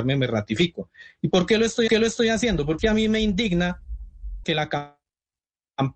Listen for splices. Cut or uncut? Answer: cut